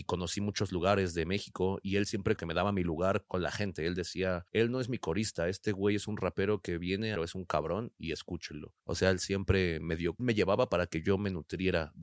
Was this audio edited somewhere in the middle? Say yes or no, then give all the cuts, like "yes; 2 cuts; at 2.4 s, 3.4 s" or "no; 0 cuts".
yes; 5 cuts; at 2.4 s, 4.5 s, 7.2 s, 8.8 s, 10.2 s